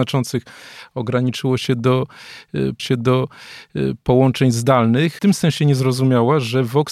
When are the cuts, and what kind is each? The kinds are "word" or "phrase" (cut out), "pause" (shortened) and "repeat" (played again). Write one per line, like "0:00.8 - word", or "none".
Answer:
0:02.8 - repeat
0:05.2 - phrase

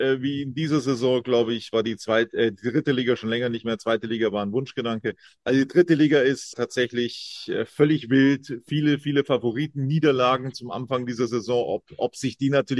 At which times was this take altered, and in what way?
0:06.5 - word

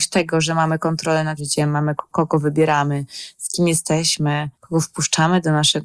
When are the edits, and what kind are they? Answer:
0:01.4 - word
0:02.1 - phrase
0:04.5 - pause

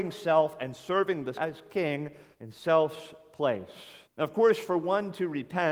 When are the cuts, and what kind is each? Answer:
0:01.3 - word
0:02.3 - pause
0:04.0 - pause

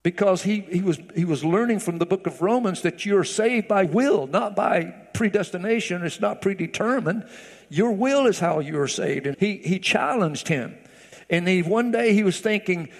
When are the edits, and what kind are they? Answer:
0:03.8 - word
0:09.3 - word

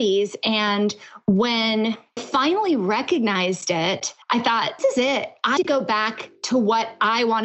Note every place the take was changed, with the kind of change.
0:02.2 - word
0:04.2 - pause
0:04.8 - word
0:05.6 - word

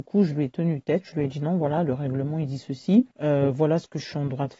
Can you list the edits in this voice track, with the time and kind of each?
0:03.1 - pause

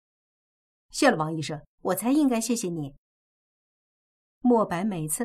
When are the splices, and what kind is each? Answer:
0:01.7 - pause

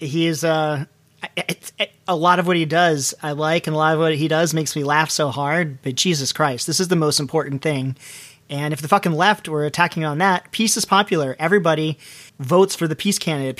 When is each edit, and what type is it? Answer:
0:12.3 - pause

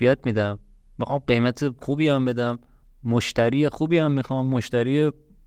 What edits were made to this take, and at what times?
none

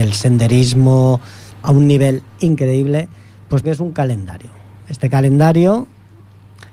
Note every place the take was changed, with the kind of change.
0:01.6 - word
0:02.3 - pause
0:03.6 - phrase

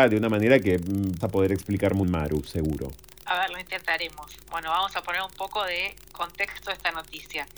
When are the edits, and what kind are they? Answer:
0:01.2 - word
0:02.0 - word

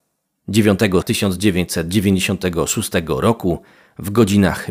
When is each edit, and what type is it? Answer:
0:01.0 - word

